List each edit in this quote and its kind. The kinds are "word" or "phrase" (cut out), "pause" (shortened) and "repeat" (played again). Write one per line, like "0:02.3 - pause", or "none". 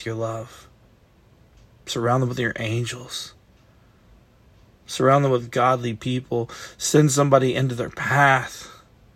none

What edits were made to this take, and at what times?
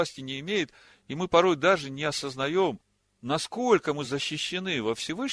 none

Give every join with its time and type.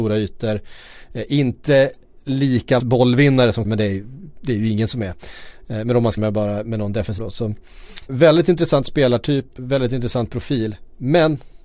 0:02.8 - word
0:03.6 - word
0:04.4 - word
0:06.2 - word
0:06.7 - word
0:07.2 - word
0:08.1 - word
0:09.6 - word

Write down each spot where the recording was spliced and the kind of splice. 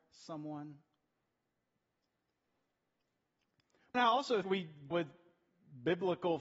0:03.9 - word
0:04.4 - word
0:04.9 - word

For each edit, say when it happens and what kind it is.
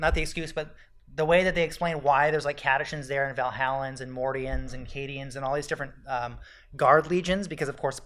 none

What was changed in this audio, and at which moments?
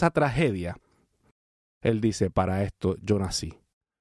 none

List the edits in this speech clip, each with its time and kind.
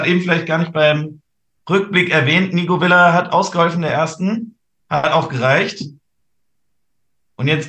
none

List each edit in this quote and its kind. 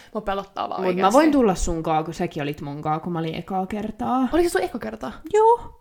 none

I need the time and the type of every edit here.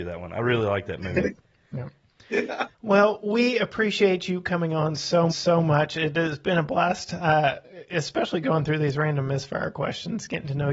0:02.7 - pause
0:05.3 - repeat

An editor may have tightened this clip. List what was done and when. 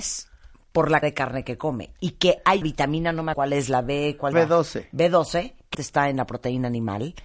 0:01.0 - word
0:02.6 - word
0:03.3 - word
0:04.3 - word
0:05.7 - word

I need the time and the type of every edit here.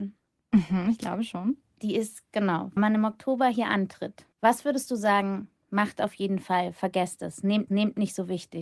0:02.8 - word
0:04.3 - pause
0:07.7 - repeat

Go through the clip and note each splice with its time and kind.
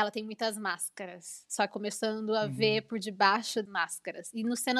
0:01.7 - phrase
0:03.7 - word

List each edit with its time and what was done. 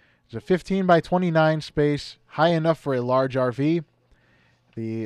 none

